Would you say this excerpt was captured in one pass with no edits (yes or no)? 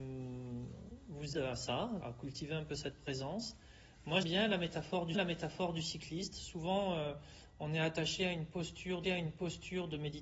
no